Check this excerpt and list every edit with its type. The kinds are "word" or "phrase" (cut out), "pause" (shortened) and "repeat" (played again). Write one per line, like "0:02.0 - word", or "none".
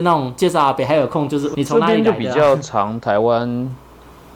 0:01.5 - word

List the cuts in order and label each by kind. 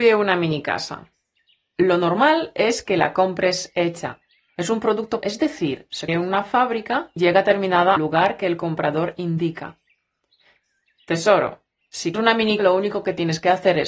0:05.2 - word
0:06.1 - word
0:07.2 - word
0:08.0 - word
0:12.1 - word
0:12.6 - word

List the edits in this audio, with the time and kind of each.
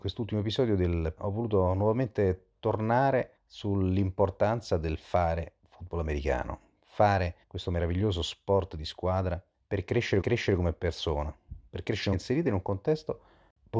0:01.2 - word
0:03.4 - pause
0:05.6 - pause
0:07.4 - pause
0:09.5 - pause
0:10.2 - repeat
0:12.1 - phrase

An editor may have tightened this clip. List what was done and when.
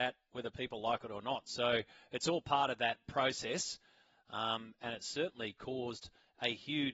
none

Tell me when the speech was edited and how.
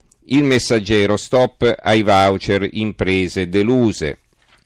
none

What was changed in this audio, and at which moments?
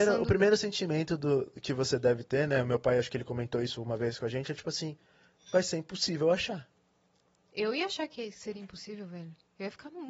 none

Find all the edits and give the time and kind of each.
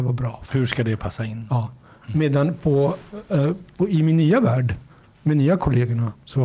none

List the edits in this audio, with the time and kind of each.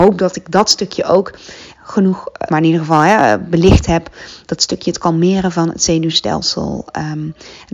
0:01.8 - word
0:02.5 - word

